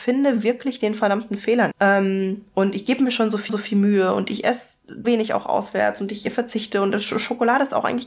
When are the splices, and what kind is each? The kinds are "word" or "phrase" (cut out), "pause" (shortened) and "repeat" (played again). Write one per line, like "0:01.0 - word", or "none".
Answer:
0:01.7 - word
0:03.5 - repeat
0:05.0 - word